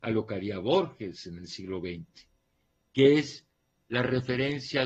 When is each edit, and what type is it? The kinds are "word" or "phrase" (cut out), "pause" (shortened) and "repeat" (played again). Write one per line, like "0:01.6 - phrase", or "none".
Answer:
none

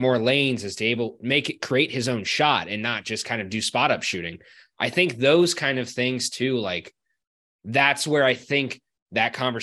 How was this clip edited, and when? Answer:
none

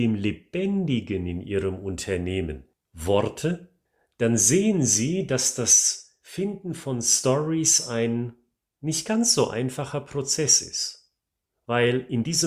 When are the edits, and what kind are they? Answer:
none

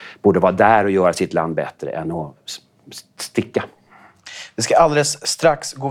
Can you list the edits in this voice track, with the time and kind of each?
none

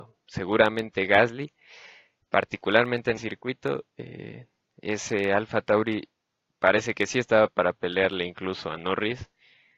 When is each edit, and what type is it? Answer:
0:03.2 - word
0:04.6 - pause

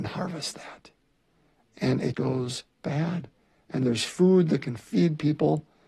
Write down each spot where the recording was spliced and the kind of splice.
0:02.1 - word

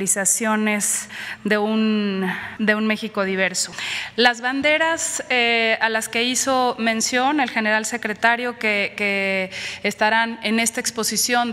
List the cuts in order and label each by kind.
none

